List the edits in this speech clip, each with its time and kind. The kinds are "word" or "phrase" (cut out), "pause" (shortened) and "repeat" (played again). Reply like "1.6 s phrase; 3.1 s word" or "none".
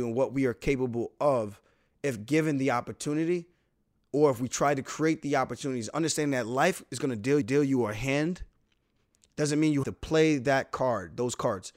7.4 s repeat; 9.8 s word